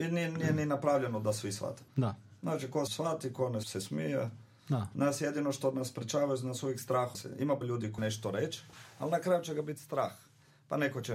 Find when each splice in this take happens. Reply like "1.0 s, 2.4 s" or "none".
1.9 s, 2.9 s, 3.6 s, 7.1 s, 7.6 s, 8.0 s